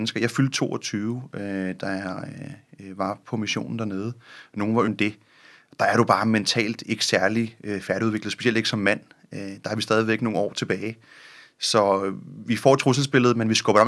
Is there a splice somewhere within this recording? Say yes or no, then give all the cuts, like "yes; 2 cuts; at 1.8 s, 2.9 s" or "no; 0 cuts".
yes; 1 cut; at 4.9 s